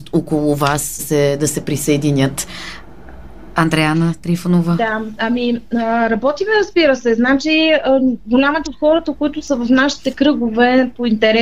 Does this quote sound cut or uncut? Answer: cut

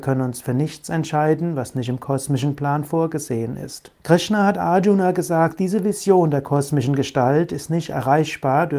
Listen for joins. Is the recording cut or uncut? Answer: cut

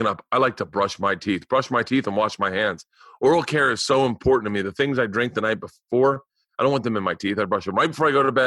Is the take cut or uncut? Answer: uncut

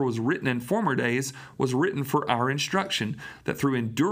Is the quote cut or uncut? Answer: uncut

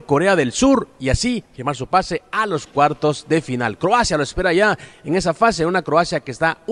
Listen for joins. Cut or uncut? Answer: uncut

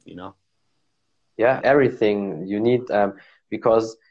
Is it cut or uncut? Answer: cut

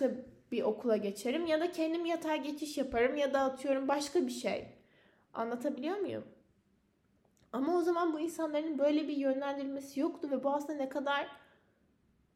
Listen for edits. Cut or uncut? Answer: uncut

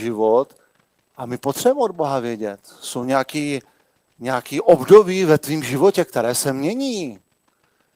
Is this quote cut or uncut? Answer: uncut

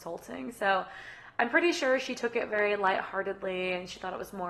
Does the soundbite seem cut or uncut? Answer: uncut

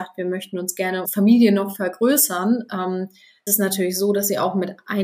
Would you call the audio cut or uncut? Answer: cut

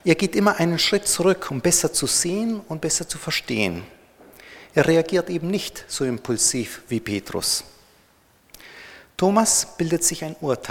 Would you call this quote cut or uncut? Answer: uncut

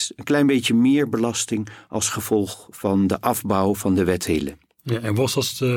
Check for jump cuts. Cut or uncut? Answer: uncut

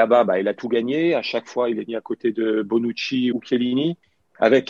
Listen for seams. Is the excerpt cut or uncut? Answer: cut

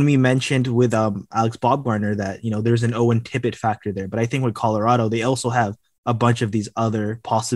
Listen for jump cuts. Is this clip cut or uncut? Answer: uncut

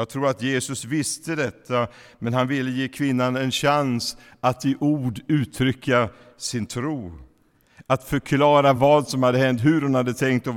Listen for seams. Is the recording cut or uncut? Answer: uncut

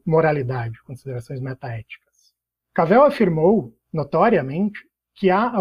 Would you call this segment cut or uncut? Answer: uncut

